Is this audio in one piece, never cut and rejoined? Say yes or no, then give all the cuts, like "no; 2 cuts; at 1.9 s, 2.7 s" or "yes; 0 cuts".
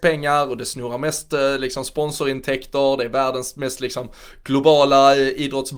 yes; 0 cuts